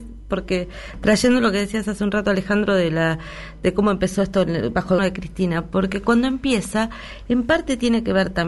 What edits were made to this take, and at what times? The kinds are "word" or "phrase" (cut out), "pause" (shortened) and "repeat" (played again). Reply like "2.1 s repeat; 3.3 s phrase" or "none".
5.0 s word

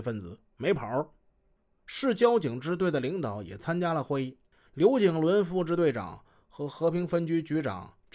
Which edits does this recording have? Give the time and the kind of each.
none

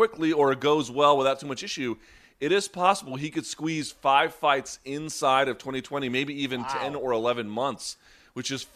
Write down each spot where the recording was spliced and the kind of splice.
none

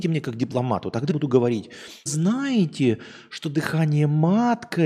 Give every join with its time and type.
1.1 s word; 2.1 s word

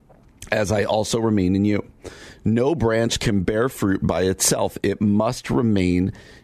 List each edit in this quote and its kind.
none

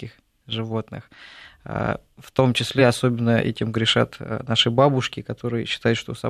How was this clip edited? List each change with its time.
none

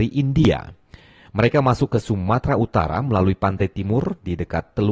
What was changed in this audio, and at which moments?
none

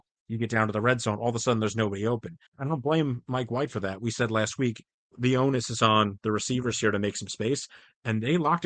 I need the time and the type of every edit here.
2.5 s pause

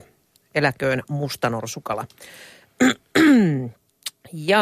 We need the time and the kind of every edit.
none

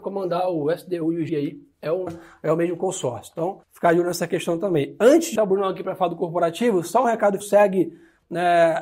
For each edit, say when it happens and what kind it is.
1.3 s word; 2.1 s word; 3.6 s pause; 5.4 s word; 7.4 s phrase

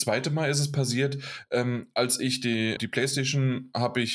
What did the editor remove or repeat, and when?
2.8 s word

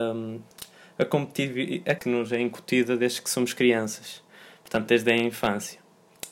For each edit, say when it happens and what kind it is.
2.0 s word

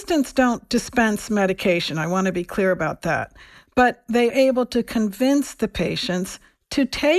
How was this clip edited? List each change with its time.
4.3 s word

